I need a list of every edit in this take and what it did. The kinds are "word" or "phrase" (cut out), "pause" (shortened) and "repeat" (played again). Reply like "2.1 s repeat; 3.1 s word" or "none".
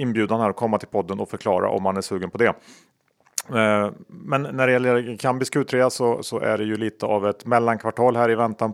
none